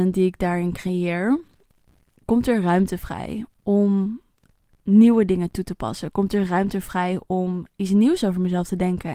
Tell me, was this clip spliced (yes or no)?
no